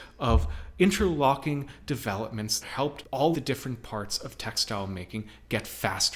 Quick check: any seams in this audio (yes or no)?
yes